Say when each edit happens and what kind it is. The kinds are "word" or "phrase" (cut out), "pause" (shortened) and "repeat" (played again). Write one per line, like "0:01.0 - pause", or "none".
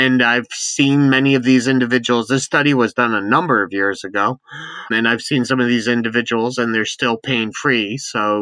0:04.9 - word